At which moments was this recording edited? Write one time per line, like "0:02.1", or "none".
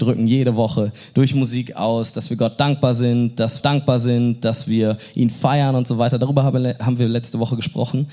0:03.6